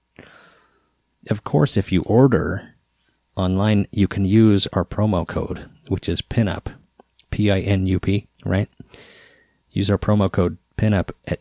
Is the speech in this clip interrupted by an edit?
yes; 1 cut; at 8.4 s

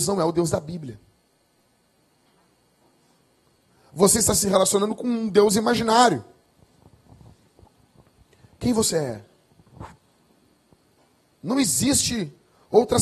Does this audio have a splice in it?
no; 0 cuts

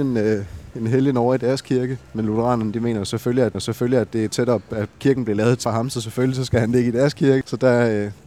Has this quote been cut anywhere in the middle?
yes; 3 cuts; at 2.1 s, 3.5 s, 5.6 s

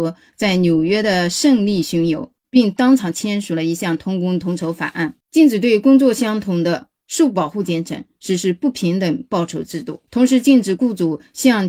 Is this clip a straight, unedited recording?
no; 3 cuts; at 2.4 s, 5.2 s, 10.1 s

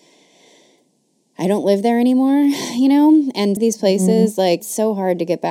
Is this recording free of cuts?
no; 2 cuts; at 3.6 s, 4.6 s

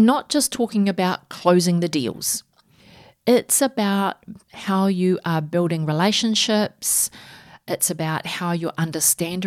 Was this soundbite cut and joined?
no; 0 cuts

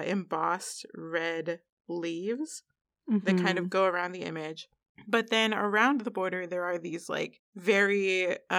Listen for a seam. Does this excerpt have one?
no; 0 cuts

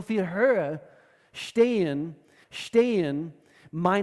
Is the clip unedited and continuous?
no; 1 cut; at 2.4 s

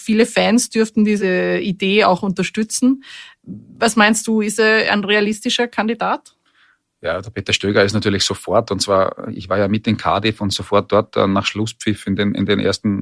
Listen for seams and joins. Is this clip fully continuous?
yes; 0 cuts

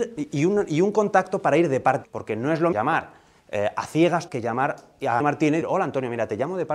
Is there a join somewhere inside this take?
yes; 5 cuts; at 2.0 s, 2.7 s, 4.3 s, 5.2 s, 5.6 s

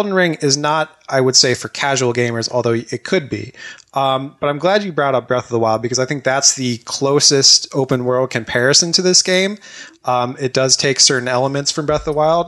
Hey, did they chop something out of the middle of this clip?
no; 0 cuts

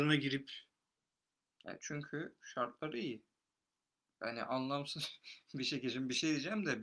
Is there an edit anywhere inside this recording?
no; 0 cuts

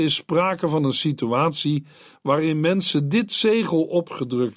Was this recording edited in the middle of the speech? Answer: no; 0 cuts

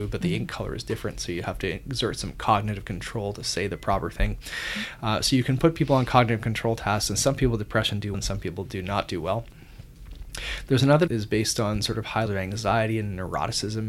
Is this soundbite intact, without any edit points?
no; 3 cuts; at 8.1 s, 11.1 s, 12.3 s

